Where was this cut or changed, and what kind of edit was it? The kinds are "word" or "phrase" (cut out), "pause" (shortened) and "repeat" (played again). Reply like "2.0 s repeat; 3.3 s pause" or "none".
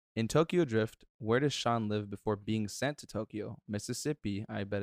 none